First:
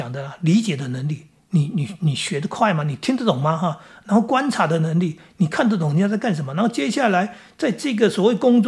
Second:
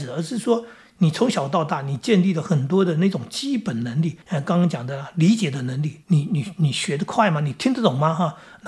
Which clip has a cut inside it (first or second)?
second